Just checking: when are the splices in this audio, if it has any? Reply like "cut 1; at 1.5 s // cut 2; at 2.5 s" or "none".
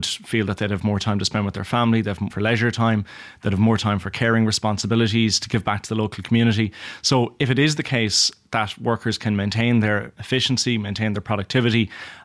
cut 1; at 2.3 s